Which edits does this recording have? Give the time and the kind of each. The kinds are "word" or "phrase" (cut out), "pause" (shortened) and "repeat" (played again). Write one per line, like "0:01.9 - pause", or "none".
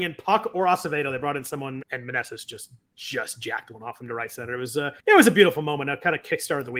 0:01.8 - word
0:05.0 - pause